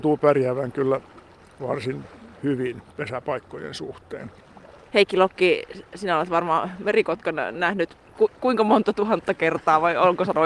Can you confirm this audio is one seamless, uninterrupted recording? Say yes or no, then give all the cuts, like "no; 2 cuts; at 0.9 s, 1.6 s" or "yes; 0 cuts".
yes; 0 cuts